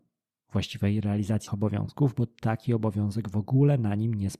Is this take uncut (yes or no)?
no